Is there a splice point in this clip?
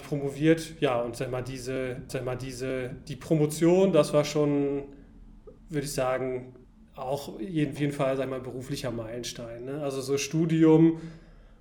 yes; 4 cuts; at 2.1 s, 5.6 s, 6.6 s, 7.8 s

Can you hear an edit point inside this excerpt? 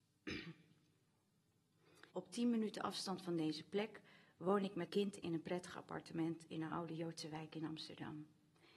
yes; 2 cuts; at 2.1 s, 4.9 s

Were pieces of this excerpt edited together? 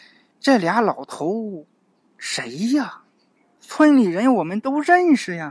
no; 0 cuts

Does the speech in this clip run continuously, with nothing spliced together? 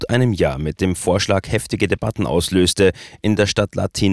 yes; 0 cuts

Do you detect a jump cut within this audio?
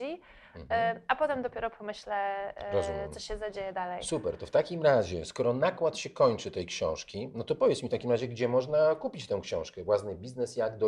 no; 0 cuts

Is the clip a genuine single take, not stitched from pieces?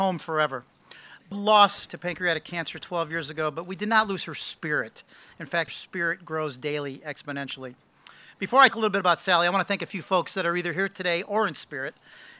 no; 4 cuts; at 1.3 s, 1.9 s, 5.7 s, 8.7 s

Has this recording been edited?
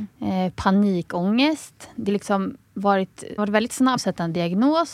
yes; 3 cuts; at 2.1 s, 3.4 s, 4.0 s

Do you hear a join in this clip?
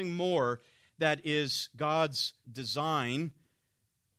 yes; 1 cut; at 2.4 s

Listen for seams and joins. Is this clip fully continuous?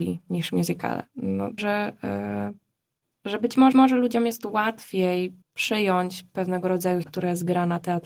no; 4 cuts; at 1.6 s, 3.7 s, 5.4 s, 7.0 s

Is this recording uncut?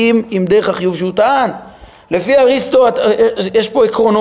yes; 0 cuts

